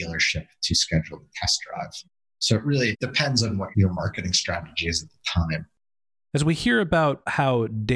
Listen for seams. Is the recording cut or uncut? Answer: uncut